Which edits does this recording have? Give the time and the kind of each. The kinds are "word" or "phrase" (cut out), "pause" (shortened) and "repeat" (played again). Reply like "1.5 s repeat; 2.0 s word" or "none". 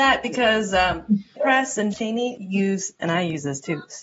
1.4 s word; 1.9 s word; 2.4 s word